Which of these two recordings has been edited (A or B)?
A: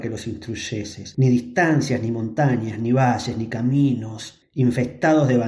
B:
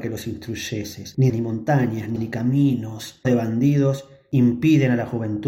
B